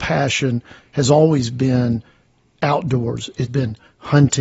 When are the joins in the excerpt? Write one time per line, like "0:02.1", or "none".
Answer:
0:03.5